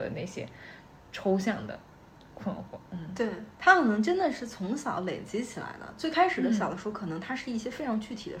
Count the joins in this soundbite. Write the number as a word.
two